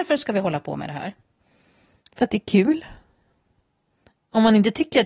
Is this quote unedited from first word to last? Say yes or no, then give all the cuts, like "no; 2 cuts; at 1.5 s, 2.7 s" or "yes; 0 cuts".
yes; 0 cuts